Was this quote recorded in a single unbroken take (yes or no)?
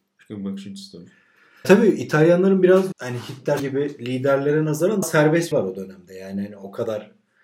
no